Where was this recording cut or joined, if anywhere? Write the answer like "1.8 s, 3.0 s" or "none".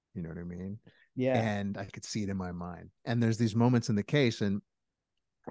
3.0 s